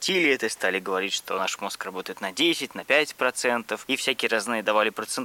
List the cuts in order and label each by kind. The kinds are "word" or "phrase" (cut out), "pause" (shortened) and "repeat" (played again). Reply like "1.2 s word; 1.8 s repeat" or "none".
none